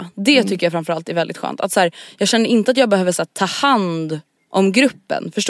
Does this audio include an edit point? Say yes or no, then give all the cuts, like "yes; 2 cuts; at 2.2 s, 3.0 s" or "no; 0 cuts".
yes; 1 cut; at 4.4 s